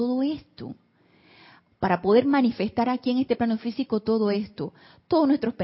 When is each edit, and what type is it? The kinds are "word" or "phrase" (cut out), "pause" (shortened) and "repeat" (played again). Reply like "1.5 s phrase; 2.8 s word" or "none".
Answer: none